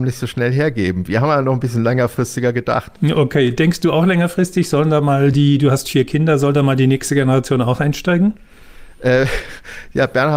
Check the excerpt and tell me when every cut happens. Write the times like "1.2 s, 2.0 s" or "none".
none

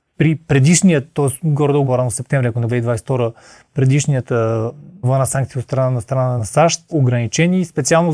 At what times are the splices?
1.8 s, 2.7 s, 5.0 s, 6.4 s, 6.9 s

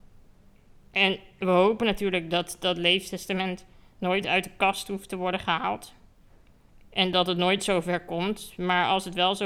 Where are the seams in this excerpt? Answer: none

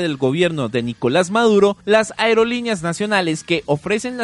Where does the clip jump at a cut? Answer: 1.8 s

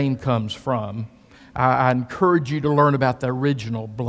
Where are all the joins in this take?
none

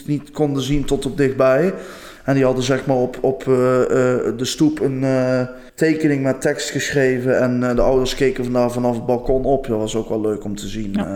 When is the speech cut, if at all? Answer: 5.7 s

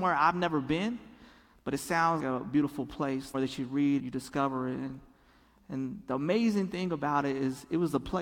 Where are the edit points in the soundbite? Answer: 2.2 s, 3.3 s, 4.0 s

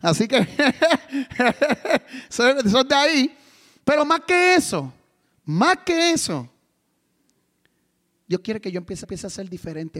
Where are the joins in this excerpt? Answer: 9.0 s

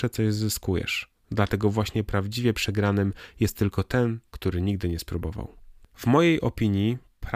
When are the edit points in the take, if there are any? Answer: none

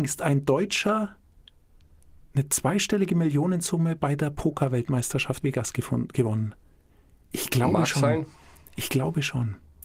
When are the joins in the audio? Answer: 5.4 s

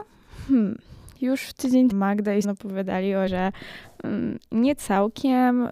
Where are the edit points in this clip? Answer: 1.9 s, 2.4 s, 3.3 s

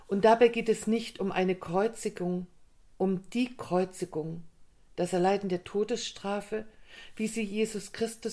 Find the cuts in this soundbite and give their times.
none

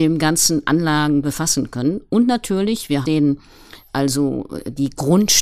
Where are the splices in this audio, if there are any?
3.0 s, 3.9 s

